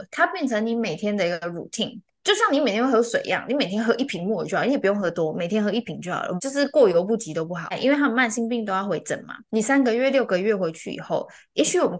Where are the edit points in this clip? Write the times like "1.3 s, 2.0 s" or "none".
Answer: 9.4 s